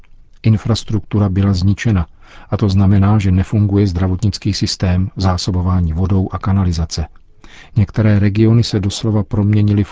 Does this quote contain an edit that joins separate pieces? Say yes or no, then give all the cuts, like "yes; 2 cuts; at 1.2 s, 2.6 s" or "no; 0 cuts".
no; 0 cuts